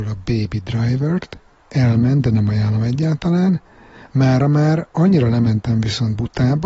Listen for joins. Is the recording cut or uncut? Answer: uncut